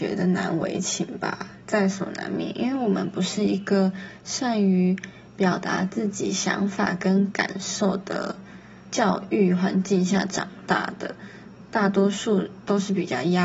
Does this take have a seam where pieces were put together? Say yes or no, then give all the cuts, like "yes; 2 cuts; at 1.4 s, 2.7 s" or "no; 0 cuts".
yes; 2 cuts; at 1.6 s, 8.8 s